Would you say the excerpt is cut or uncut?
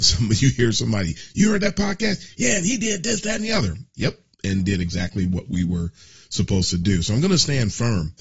uncut